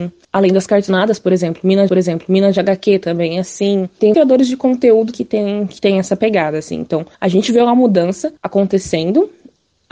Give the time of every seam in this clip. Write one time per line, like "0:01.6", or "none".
0:01.9
0:04.1
0:05.1
0:07.1
0:08.4

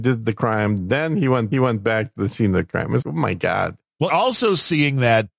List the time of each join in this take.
0:01.5
0:03.0
0:04.1

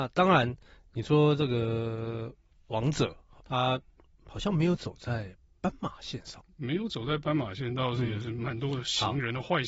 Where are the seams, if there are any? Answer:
0:03.4

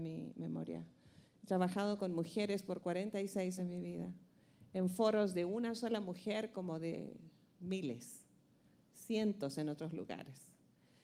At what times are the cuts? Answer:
0:03.6

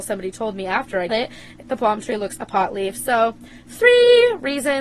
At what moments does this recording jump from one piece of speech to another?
0:01.1
0:01.6
0:02.4

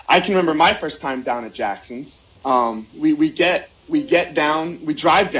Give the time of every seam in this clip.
0:02.3

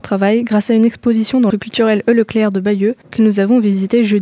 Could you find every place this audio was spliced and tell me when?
0:01.5
0:03.0

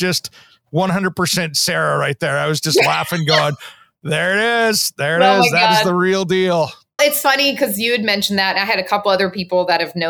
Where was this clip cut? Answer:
0:07.0

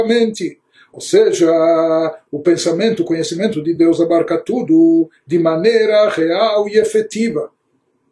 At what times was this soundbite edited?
none

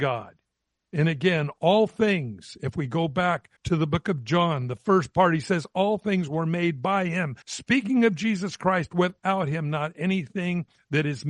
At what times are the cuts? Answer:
0:03.6
0:07.4

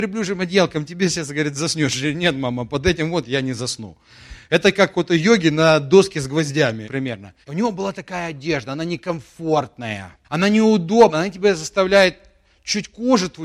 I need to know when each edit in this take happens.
0:06.8
0:07.4
0:10.2

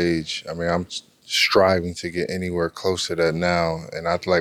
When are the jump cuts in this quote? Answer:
none

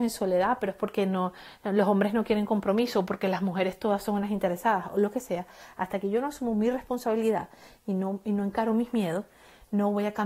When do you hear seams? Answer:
none

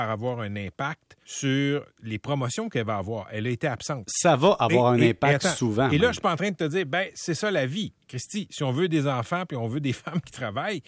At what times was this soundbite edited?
0:01.2

